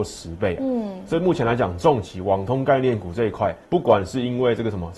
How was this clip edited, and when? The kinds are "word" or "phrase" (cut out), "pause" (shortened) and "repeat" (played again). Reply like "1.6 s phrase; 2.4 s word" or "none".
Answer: 3.6 s pause